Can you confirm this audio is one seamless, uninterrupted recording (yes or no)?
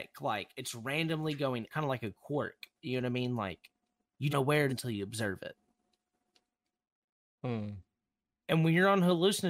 no